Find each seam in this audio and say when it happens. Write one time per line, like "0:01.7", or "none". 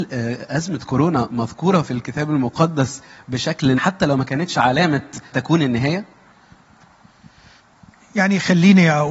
0:03.8
0:05.3